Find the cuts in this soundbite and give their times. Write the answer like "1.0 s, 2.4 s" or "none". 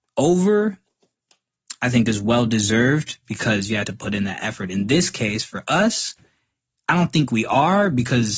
none